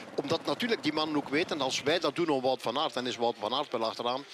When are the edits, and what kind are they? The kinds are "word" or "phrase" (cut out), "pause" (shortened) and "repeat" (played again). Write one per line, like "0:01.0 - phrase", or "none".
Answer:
none